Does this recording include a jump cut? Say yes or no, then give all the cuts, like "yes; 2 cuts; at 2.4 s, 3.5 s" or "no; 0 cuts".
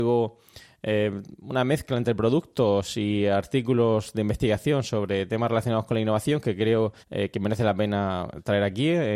yes; 1 cut; at 7.0 s